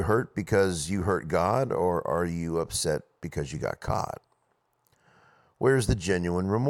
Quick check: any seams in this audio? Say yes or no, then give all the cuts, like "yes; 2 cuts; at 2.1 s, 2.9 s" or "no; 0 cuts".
no; 0 cuts